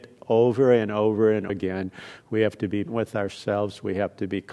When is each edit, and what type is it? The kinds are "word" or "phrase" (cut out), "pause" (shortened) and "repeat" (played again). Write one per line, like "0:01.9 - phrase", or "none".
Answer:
0:01.5 - word
0:02.9 - word

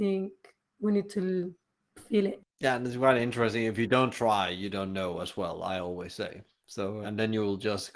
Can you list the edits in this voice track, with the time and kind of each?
0:02.5 - pause
0:07.0 - word

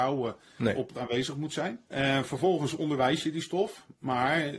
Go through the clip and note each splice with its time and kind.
0:00.9 - word
0:01.9 - pause

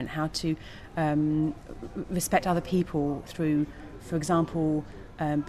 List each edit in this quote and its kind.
none

